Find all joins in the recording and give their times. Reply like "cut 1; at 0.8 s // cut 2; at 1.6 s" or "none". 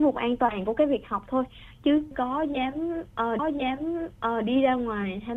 cut 1; at 2.1 s // cut 2; at 3.4 s